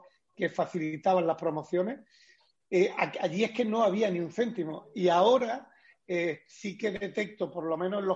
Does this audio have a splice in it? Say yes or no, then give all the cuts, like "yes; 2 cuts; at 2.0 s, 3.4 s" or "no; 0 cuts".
no; 0 cuts